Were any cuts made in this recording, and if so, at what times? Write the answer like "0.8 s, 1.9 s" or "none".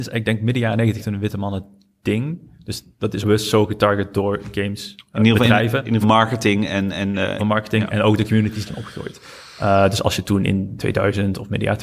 1.0 s, 3.2 s, 6.0 s, 7.4 s, 8.7 s, 10.8 s